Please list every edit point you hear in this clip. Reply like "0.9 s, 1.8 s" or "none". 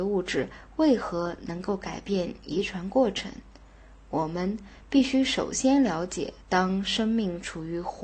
6.4 s

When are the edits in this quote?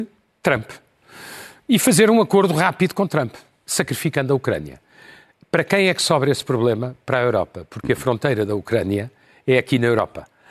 none

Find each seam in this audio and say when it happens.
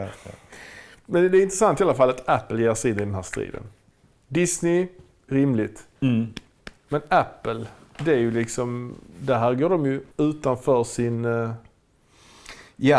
6.0 s, 10.1 s

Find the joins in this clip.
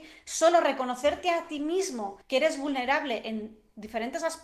2.2 s

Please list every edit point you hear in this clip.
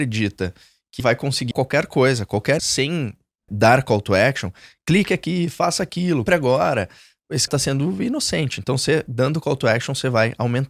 1.0 s, 1.5 s, 2.6 s, 3.5 s, 6.3 s, 7.5 s

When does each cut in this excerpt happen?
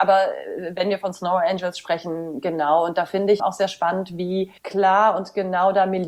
3.4 s, 4.6 s

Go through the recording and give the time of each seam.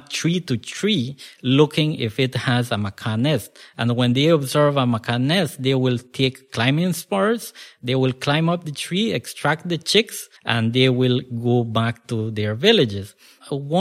10.4 s

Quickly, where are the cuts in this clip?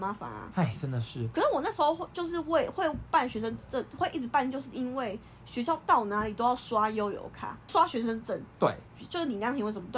7.7 s

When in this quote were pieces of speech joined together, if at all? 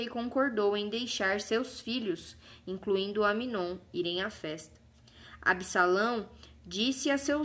none

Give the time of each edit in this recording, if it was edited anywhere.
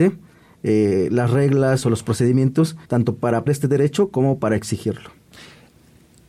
1.8 s, 2.8 s, 3.5 s

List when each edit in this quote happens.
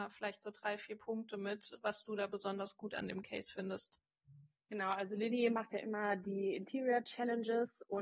none

